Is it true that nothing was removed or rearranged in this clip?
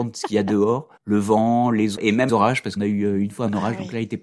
no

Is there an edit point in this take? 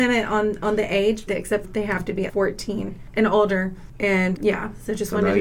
yes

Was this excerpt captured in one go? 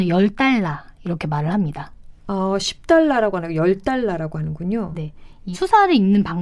no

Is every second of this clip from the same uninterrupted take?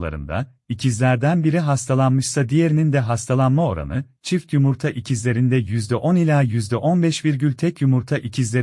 yes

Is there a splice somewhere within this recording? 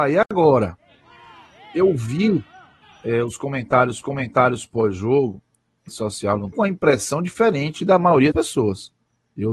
yes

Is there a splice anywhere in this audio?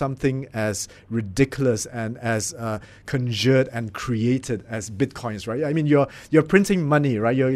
no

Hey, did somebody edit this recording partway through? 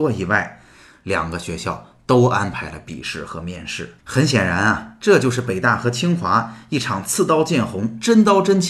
yes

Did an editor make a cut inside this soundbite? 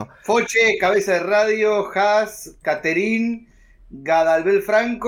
no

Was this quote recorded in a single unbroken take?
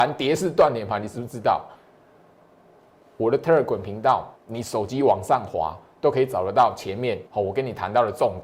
no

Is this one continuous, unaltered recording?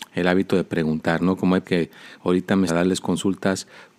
no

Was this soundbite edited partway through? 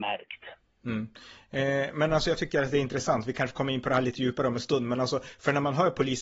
no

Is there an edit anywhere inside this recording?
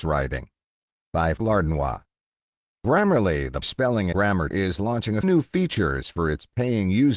yes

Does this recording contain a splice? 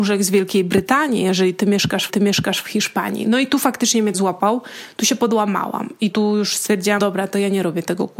yes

